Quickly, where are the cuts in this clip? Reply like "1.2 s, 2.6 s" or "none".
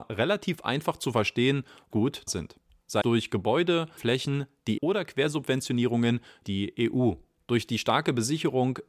1.9 s, 2.3 s, 3.0 s, 4.0 s, 4.8 s, 6.4 s